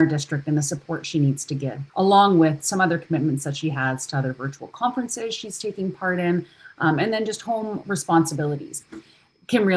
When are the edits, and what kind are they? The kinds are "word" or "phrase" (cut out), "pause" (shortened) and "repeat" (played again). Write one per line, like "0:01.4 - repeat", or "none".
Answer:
0:01.9 - pause